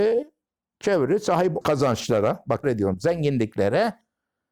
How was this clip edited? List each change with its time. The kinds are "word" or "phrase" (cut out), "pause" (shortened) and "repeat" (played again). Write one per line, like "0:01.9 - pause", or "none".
0:01.6 - word
0:02.6 - word